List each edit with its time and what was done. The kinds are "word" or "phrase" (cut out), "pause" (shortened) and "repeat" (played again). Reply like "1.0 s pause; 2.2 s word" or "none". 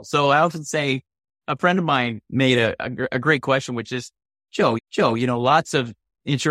4.8 s repeat